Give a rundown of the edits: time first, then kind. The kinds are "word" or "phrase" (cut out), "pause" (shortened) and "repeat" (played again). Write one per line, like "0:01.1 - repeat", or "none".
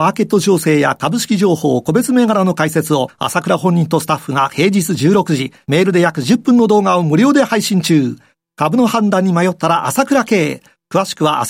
none